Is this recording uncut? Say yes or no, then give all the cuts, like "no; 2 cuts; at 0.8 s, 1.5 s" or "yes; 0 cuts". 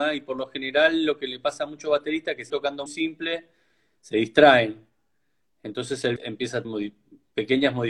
no; 4 cuts; at 2.5 s, 2.9 s, 6.2 s, 6.6 s